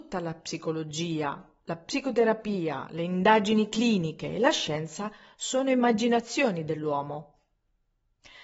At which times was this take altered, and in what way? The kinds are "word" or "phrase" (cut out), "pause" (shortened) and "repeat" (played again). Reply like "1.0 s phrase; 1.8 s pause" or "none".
none